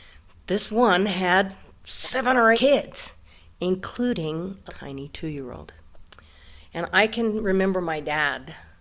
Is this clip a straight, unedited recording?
no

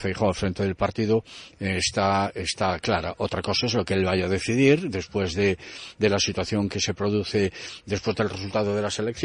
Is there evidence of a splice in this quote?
no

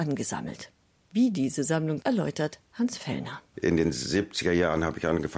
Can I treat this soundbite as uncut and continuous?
no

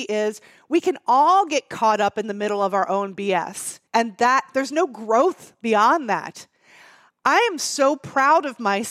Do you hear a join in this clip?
yes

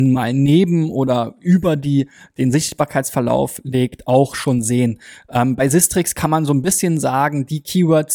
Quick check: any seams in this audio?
no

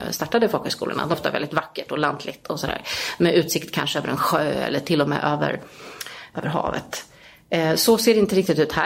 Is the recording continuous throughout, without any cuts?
no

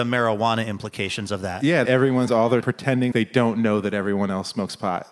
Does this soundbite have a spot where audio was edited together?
yes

